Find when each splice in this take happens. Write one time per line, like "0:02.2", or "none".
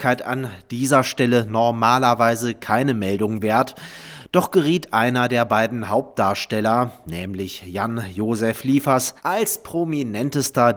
0:09.2